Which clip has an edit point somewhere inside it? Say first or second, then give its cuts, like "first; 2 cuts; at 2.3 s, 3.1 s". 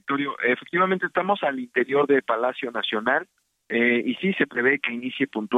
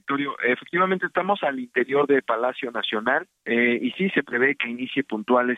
second; 1 cut; at 3.4 s